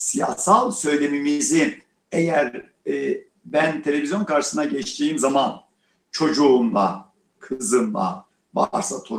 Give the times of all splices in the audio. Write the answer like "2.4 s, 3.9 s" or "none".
none